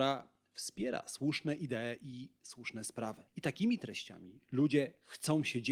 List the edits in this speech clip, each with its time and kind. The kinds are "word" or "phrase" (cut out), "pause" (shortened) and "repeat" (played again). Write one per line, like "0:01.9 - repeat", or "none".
0:03.3 - pause